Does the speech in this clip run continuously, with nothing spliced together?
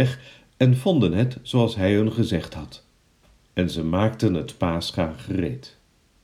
yes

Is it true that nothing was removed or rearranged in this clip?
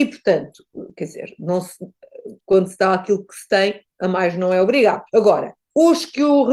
no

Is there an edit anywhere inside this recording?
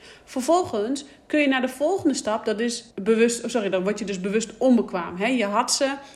yes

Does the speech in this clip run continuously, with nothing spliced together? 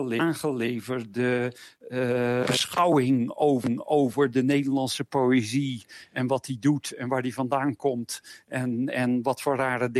yes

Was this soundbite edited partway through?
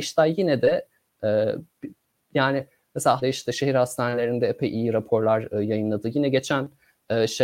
yes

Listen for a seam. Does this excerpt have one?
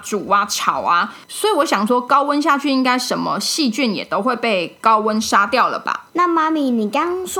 yes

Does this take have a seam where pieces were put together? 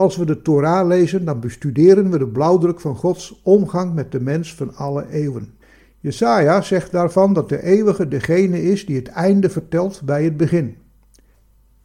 yes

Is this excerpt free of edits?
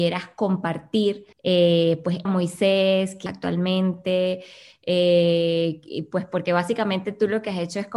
no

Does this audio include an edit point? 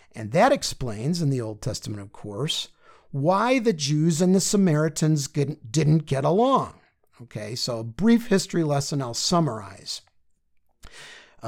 no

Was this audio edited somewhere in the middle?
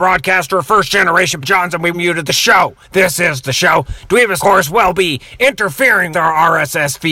yes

